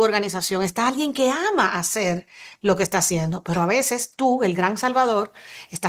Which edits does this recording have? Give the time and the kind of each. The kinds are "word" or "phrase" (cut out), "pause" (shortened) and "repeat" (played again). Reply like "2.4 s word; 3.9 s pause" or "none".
none